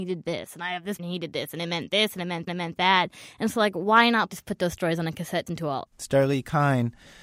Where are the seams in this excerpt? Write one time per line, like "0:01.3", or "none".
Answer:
0:01.0
0:02.5
0:05.5
0:05.9

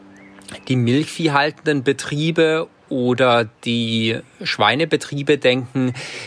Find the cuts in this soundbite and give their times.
none

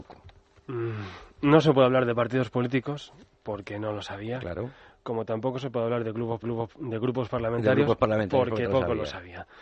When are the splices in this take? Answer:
0:06.4
0:08.7

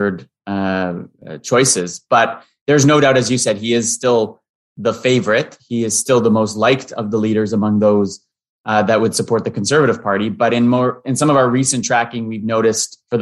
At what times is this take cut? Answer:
none

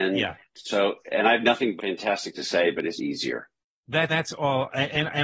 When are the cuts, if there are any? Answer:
0:01.8
0:02.3
0:03.0
0:04.1

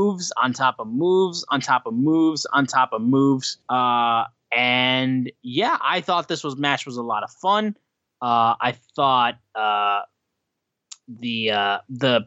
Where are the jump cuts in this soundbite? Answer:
0:03.6

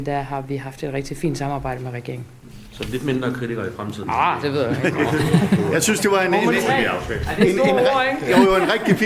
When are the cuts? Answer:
none

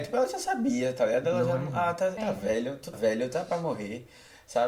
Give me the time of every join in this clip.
0:02.2
0:02.9

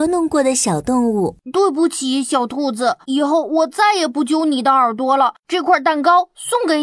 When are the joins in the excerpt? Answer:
0:01.4
0:03.0
0:05.4

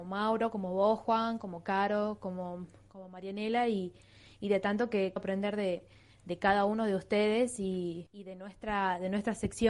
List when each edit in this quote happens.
0:05.2

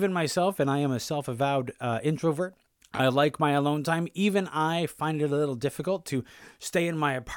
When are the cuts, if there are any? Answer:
0:02.7

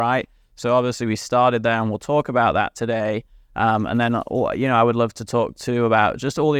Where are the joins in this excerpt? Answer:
none

